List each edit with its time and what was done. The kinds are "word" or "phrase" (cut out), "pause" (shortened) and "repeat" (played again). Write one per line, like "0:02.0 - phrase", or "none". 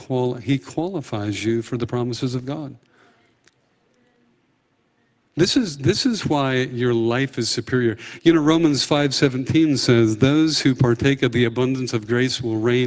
none